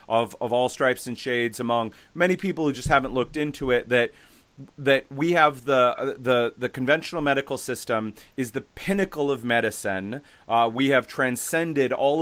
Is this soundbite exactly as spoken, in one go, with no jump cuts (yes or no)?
yes